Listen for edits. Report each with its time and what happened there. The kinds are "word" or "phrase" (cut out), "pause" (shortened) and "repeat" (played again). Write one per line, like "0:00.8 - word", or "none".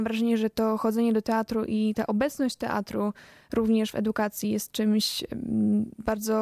none